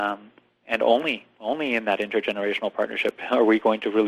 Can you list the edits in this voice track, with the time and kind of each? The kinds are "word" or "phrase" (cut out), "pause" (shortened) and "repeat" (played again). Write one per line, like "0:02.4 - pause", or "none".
none